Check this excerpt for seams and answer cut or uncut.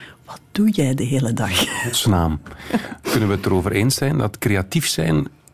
uncut